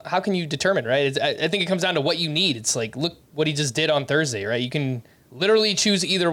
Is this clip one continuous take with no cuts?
yes; 0 cuts

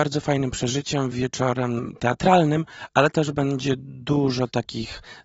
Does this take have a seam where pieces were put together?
no; 0 cuts

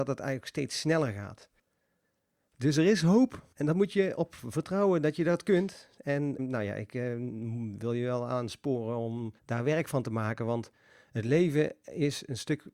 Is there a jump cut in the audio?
yes; 3 cuts; at 3.5 s, 6.4 s, 9.4 s

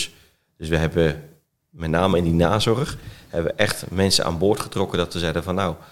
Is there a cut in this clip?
no; 0 cuts

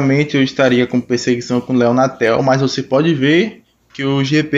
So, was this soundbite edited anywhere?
no; 0 cuts

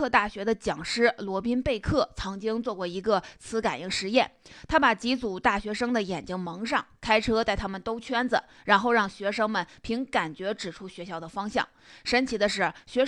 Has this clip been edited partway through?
no; 0 cuts

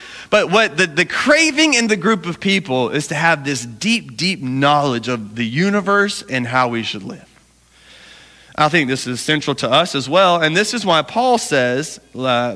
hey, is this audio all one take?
yes; 0 cuts

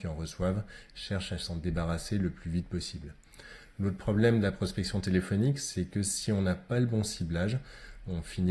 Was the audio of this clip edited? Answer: no; 0 cuts

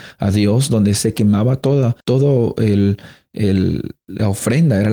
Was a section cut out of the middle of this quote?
yes; 1 cut; at 2.0 s

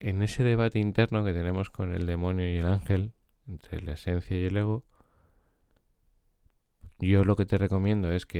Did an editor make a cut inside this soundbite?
no; 0 cuts

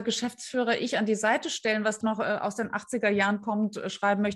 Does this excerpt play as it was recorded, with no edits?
no; 1 cut; at 2.0 s

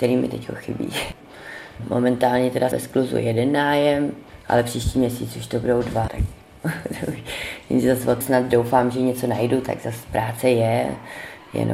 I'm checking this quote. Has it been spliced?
yes; 3 cuts; at 2.7 s, 6.1 s, 8.2 s

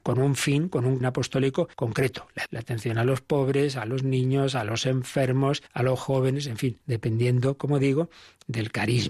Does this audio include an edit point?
yes; 5 cuts; at 1.0 s, 1.7 s, 2.5 s, 5.7 s, 6.8 s

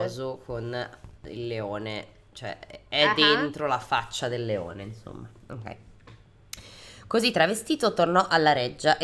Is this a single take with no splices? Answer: yes; 0 cuts

